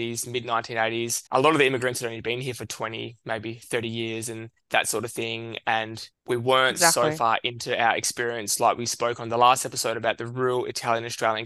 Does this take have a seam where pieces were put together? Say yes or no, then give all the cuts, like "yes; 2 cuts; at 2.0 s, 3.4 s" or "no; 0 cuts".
yes; 3 cuts; at 1.3 s, 4.6 s, 6.1 s